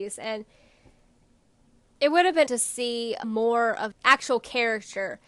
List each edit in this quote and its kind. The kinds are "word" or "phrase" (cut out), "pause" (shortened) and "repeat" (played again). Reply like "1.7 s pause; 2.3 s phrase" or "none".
2.5 s word; 3.2 s word; 3.9 s word